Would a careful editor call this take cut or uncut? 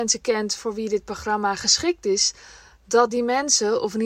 uncut